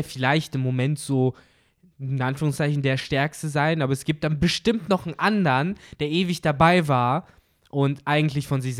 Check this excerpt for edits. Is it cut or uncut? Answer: uncut